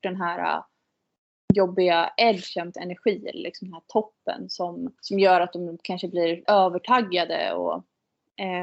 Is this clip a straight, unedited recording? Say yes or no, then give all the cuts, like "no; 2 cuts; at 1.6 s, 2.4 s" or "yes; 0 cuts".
no; 3 cuts; at 2.7 s, 5.0 s, 6.5 s